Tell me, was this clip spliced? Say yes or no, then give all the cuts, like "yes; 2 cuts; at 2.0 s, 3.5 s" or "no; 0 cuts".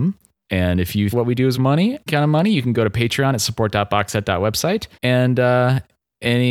yes; 4 cuts; at 1.1 s, 1.5 s, 2.1 s, 4.9 s